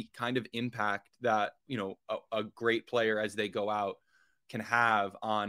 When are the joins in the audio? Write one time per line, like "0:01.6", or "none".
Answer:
0:01.6